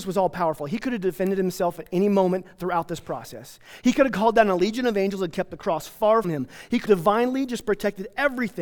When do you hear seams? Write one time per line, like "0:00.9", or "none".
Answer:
0:06.2
0:06.9